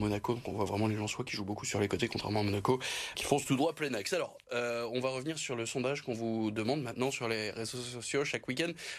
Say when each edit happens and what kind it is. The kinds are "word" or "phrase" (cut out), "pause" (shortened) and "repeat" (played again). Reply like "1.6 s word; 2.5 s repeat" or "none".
3.1 s word